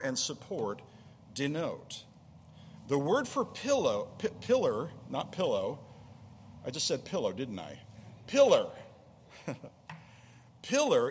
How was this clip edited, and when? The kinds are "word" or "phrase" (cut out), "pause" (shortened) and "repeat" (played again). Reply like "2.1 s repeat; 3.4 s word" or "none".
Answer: none